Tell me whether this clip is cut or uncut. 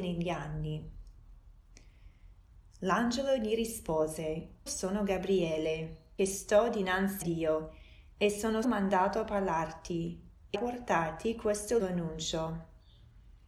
cut